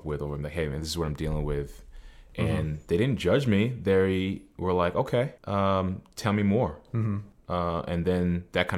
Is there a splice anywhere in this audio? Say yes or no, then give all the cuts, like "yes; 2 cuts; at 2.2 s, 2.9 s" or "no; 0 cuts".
yes; 1 cut; at 5.4 s